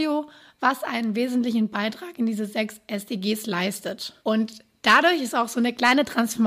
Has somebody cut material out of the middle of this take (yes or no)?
yes